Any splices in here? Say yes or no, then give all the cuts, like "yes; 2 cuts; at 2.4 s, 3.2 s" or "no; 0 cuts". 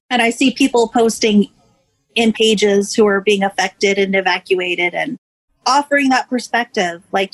yes; 1 cut; at 2.3 s